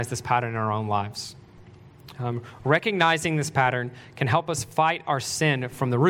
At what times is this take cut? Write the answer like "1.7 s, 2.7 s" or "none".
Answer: none